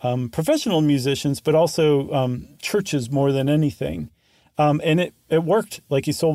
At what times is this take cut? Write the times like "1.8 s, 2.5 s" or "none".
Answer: none